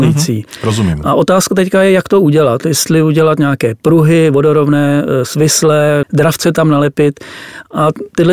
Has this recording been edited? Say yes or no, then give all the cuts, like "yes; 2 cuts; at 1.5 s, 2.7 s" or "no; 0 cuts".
yes; 1 cut; at 6.0 s